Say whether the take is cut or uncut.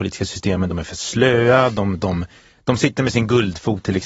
uncut